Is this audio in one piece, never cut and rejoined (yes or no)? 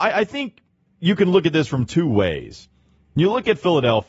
yes